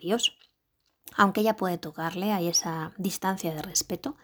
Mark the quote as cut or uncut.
uncut